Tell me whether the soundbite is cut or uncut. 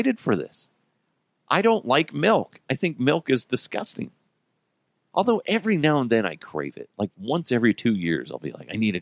uncut